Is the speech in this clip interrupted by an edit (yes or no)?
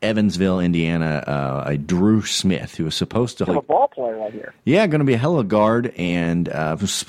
yes